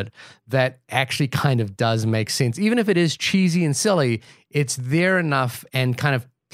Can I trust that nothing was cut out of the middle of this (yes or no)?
yes